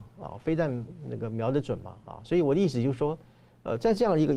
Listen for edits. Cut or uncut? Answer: uncut